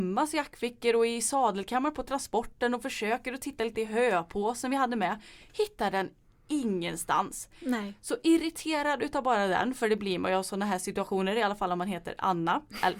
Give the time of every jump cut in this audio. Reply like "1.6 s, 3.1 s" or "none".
none